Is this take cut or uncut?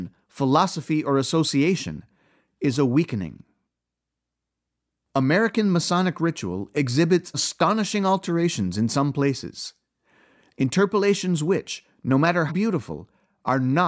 cut